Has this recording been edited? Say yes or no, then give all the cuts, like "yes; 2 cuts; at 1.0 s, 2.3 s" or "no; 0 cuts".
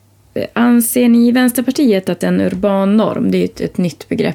yes; 1 cut; at 2.2 s